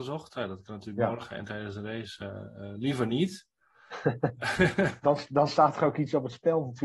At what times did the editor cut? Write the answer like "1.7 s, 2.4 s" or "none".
5.0 s